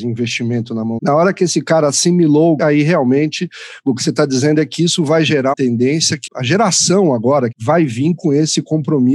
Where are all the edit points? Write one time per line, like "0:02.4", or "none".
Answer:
0:01.0
0:02.6
0:05.5
0:06.3
0:07.5